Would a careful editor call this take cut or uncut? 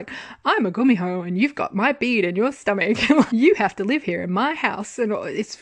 cut